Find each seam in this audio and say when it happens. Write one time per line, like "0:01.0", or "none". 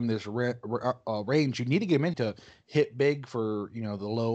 0:02.1